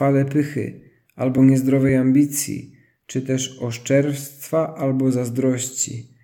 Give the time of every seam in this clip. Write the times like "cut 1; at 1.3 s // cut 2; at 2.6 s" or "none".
none